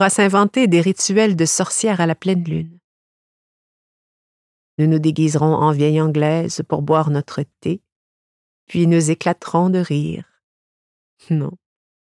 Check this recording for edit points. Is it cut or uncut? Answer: uncut